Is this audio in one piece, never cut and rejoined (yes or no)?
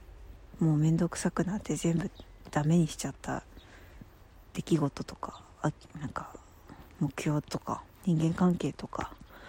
no